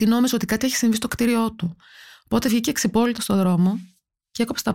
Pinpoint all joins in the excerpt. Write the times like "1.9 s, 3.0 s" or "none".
none